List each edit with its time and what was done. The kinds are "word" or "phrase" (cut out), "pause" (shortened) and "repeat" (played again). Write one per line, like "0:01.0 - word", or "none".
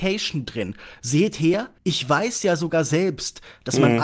0:01.8 - pause